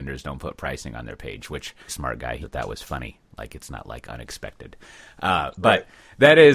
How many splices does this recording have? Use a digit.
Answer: 2